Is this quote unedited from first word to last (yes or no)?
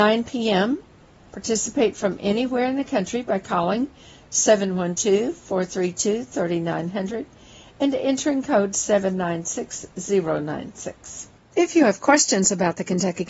yes